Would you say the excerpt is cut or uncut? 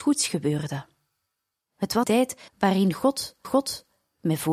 cut